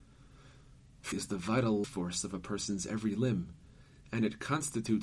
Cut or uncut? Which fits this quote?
cut